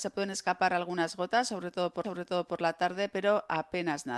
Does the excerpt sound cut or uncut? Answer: cut